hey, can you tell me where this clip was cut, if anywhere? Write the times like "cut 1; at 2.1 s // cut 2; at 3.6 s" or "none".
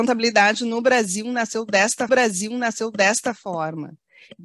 cut 1; at 2.1 s